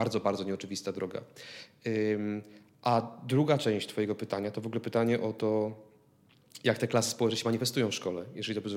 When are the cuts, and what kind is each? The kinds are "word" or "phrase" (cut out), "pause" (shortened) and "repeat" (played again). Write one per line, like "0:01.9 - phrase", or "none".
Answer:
none